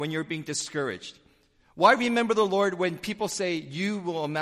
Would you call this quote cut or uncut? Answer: uncut